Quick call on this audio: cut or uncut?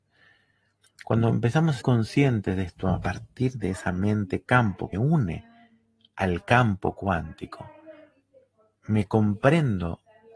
cut